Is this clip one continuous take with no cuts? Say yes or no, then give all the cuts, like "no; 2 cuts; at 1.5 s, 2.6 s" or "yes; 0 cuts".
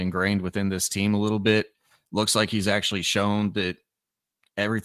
yes; 0 cuts